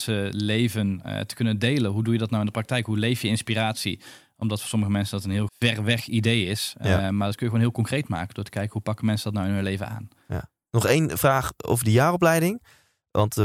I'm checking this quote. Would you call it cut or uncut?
cut